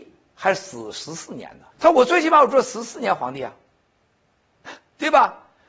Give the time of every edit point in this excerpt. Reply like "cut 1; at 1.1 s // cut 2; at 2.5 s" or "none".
cut 1; at 1.7 s